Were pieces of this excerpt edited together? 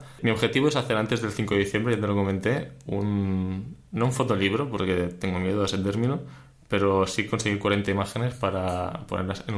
no; 0 cuts

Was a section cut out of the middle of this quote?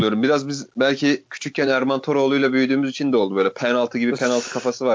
no; 0 cuts

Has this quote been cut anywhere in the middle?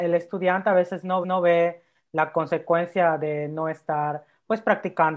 yes; 1 cut; at 1.2 s

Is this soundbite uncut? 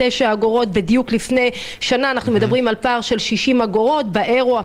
yes; 0 cuts

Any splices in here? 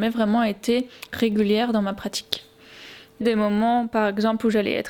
yes; 2 cuts; at 1.1 s, 3.2 s

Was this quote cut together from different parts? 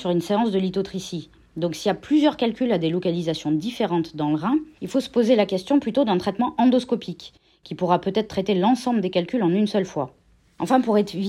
no; 0 cuts

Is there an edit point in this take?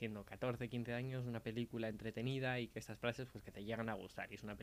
no; 0 cuts

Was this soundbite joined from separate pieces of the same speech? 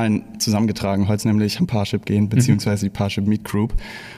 yes; 2 cuts; at 1.2 s, 1.6 s

